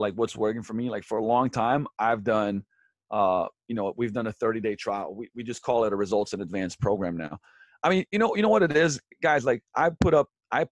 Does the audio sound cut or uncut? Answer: uncut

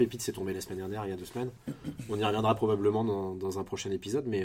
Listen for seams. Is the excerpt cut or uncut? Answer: uncut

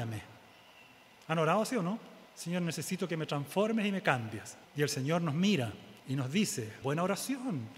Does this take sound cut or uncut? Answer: cut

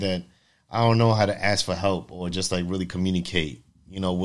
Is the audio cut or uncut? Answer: uncut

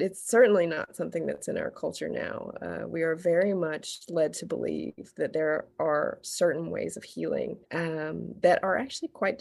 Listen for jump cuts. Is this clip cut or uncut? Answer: cut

